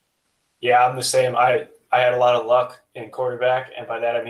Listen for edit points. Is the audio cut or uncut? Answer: uncut